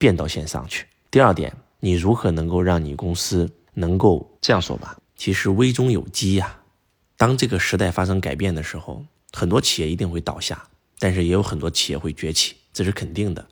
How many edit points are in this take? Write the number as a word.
one